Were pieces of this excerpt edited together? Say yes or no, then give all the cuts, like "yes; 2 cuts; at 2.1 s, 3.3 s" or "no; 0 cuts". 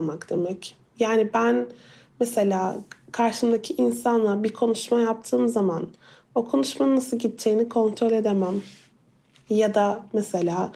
no; 0 cuts